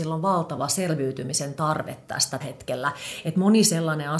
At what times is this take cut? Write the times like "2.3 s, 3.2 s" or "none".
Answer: 2.4 s